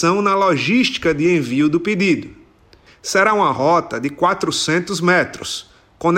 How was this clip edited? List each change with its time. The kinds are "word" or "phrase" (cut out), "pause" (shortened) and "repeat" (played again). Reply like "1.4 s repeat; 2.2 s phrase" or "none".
none